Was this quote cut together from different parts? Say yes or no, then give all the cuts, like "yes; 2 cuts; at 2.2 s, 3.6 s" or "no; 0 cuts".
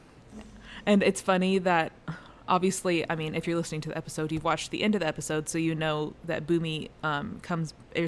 no; 0 cuts